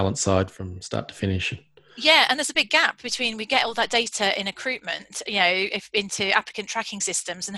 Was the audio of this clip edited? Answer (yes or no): no